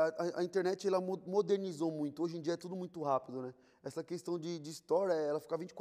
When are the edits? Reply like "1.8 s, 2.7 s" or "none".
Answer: none